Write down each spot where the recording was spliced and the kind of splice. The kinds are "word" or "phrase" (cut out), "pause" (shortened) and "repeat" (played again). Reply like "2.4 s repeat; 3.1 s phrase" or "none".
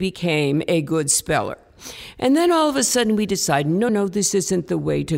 3.9 s word